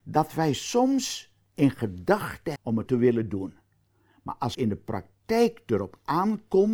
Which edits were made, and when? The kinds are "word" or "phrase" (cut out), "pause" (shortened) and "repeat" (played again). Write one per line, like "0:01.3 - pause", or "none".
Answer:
0:02.6 - word
0:02.9 - word
0:04.5 - word